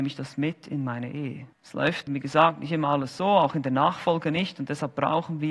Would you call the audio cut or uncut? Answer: cut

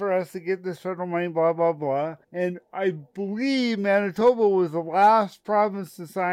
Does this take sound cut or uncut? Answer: cut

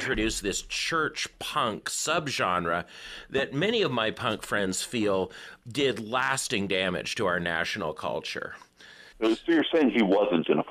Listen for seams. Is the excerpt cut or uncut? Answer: cut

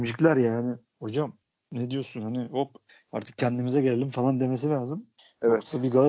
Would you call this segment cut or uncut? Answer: uncut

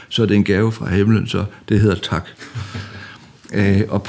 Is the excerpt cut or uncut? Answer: uncut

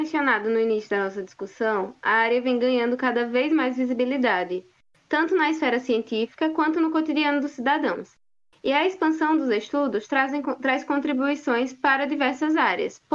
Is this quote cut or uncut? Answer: uncut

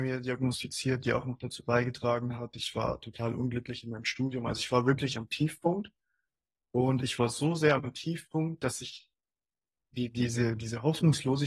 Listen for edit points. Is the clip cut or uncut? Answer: uncut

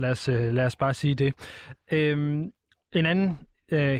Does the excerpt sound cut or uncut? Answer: uncut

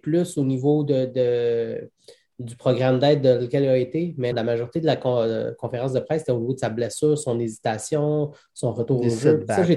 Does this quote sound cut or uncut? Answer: cut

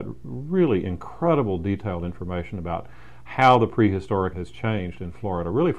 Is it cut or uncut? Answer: cut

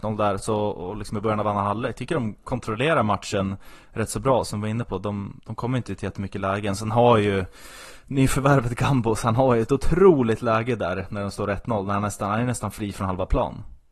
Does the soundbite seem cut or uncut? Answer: uncut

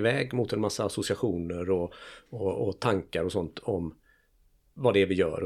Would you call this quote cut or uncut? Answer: uncut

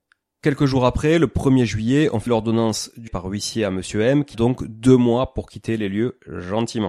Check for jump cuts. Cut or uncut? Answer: cut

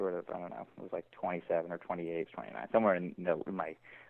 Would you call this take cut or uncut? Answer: cut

